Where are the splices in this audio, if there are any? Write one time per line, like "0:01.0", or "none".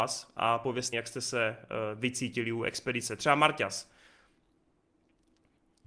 0:00.9